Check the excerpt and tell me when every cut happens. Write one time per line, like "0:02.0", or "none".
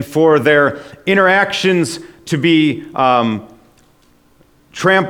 none